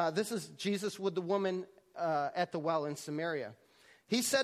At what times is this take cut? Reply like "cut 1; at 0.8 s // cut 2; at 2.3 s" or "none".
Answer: none